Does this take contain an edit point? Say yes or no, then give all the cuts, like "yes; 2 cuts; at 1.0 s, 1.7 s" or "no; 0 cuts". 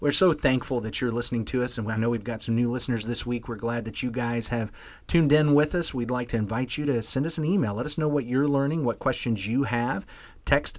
no; 0 cuts